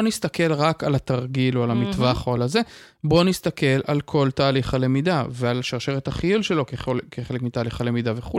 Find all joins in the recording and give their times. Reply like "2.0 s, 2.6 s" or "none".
none